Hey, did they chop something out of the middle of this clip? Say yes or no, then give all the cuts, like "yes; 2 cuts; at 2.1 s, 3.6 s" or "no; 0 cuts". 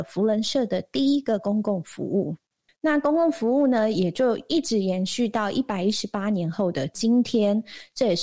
yes; 1 cut; at 2.7 s